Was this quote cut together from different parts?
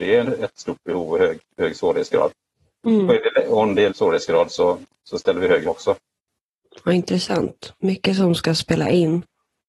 yes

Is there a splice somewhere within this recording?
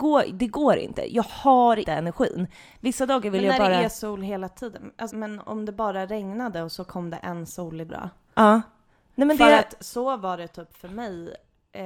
yes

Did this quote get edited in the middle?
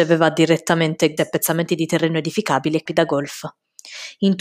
yes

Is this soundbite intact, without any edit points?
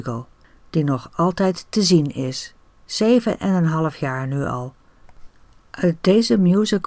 yes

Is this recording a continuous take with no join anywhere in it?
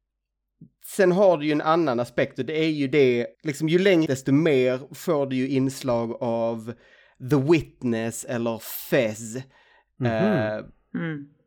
no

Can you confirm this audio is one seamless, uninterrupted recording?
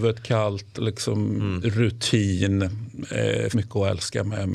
no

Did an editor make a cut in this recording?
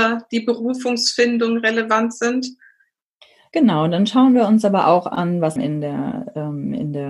yes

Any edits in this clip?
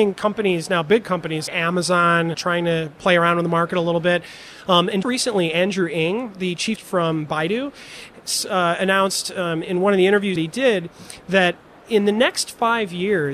yes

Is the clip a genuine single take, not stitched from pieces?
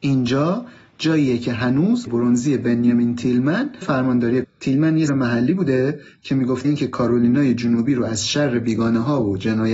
no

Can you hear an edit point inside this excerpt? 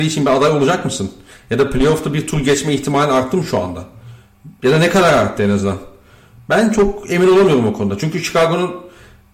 no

